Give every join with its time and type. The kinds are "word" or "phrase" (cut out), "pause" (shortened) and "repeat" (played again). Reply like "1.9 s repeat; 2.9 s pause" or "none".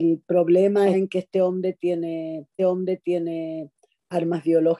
0.9 s word; 2.6 s repeat